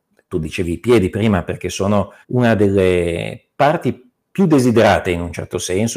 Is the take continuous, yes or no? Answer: no